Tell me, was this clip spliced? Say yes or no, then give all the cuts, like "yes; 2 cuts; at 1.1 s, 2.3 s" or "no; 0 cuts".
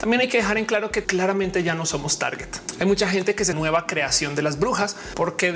yes; 2 cuts; at 1.0 s, 3.5 s